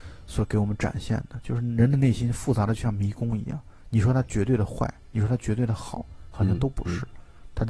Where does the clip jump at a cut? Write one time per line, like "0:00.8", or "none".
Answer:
none